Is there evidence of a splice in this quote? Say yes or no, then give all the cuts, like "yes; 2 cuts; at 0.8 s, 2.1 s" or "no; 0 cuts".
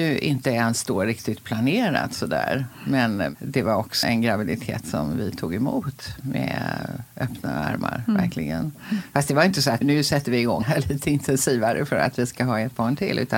yes; 3 cuts; at 4.0 s, 9.8 s, 10.6 s